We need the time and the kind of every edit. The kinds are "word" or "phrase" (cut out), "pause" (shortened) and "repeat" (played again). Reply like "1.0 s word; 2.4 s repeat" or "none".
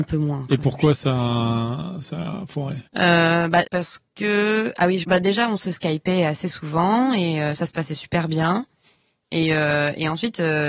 2.9 s pause; 3.7 s word; 5.0 s phrase